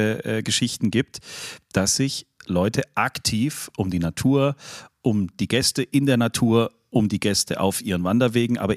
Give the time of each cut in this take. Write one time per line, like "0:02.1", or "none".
none